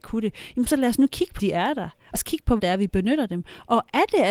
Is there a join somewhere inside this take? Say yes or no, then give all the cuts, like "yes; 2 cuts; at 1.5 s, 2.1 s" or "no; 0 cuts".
yes; 3 cuts; at 1.4 s, 2.1 s, 2.6 s